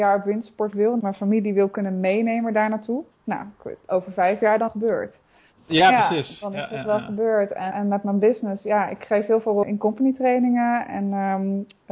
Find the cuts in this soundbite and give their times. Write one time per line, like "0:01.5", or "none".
0:01.0
0:03.1
0:04.7
0:07.7
0:09.6